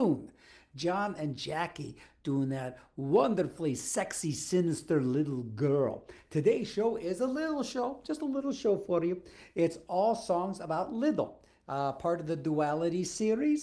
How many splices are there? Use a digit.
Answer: 0